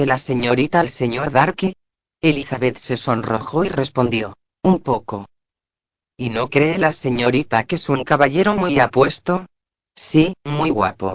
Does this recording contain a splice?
no; 0 cuts

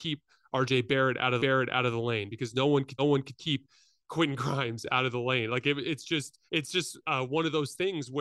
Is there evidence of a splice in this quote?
yes; 4 cuts; at 1.4 s, 3.0 s, 6.5 s, 7.0 s

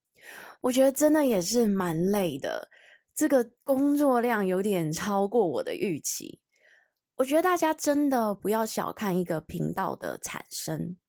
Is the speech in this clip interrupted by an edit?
no; 0 cuts

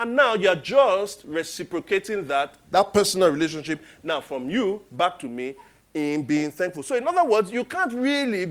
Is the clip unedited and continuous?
yes; 0 cuts

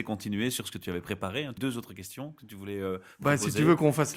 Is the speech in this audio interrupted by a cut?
yes; 1 cut; at 1.6 s

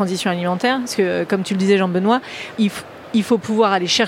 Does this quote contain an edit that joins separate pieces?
yes; 1 cut; at 2.5 s

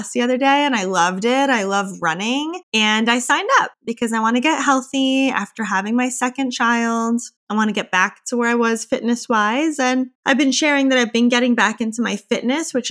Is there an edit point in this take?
yes; 4 cuts; at 2.6 s, 3.7 s, 7.4 s, 10.2 s

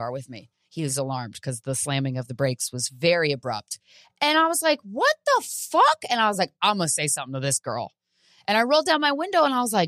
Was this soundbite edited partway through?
no; 0 cuts

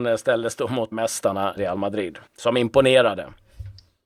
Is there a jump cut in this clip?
yes; 3 cuts; at 0.9 s, 1.6 s, 2.3 s

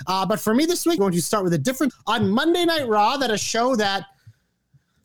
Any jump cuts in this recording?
yes; 2 cuts; at 1.0 s, 1.9 s

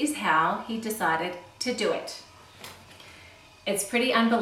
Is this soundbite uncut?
yes; 0 cuts

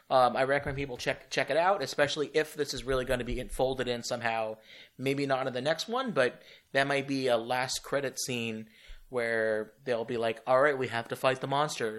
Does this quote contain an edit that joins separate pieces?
no; 0 cuts

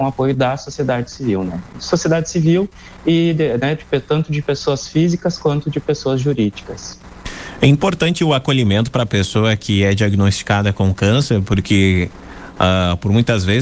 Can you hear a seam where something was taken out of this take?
no; 0 cuts

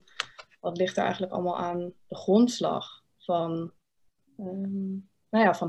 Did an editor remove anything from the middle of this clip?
yes; 1 cut; at 3.1 s

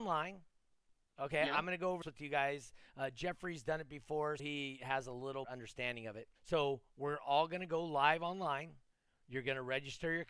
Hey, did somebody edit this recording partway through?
yes; 5 cuts; at 2.0 s, 4.4 s, 5.4 s, 6.4 s, 8.9 s

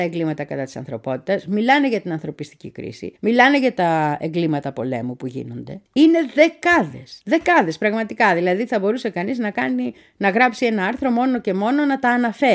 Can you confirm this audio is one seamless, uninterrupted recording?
no; 3 cuts; at 3.2 s, 5.9 s, 7.2 s

